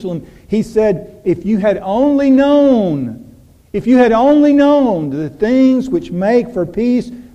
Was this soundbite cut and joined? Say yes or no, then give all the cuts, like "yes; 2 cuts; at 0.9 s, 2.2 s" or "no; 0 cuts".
no; 0 cuts